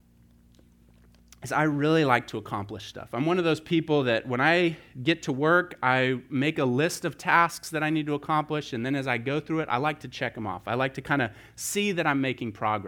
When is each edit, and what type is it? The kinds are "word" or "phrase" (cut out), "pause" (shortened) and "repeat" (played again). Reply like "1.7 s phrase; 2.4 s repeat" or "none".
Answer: none